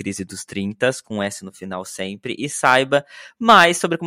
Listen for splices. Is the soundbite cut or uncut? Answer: uncut